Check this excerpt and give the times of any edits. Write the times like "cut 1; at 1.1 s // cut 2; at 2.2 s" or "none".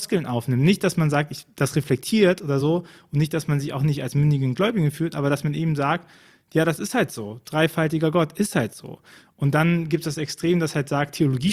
none